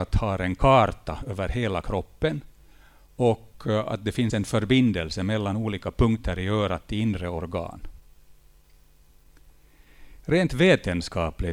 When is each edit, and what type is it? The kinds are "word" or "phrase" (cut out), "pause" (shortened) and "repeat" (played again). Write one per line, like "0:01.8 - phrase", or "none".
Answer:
none